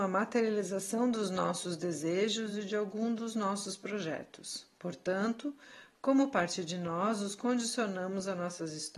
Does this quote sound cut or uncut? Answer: uncut